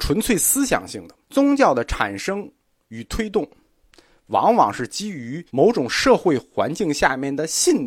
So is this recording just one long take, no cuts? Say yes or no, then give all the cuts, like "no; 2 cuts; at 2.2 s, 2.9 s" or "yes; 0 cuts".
no; 2 cuts; at 1.2 s, 5.5 s